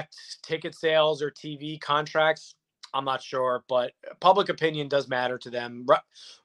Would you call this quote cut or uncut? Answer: uncut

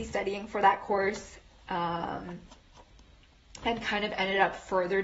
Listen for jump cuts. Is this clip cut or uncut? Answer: uncut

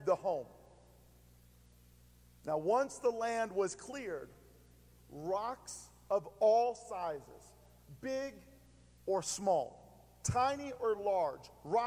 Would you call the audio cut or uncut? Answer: uncut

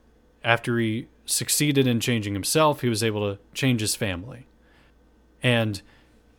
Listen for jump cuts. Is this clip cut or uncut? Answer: cut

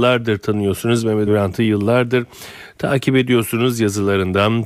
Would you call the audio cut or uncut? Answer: cut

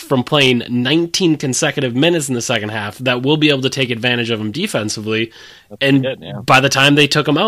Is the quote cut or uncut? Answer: uncut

